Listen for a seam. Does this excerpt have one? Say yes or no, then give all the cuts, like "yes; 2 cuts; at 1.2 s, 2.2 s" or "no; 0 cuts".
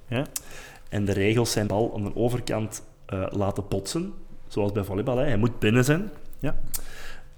yes; 1 cut; at 1.7 s